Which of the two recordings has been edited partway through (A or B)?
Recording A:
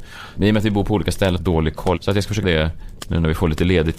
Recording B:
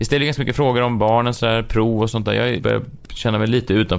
A